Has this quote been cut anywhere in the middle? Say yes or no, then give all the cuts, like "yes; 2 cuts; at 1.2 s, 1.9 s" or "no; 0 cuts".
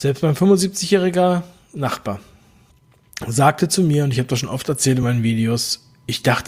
no; 0 cuts